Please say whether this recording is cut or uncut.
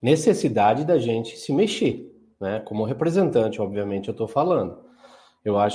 uncut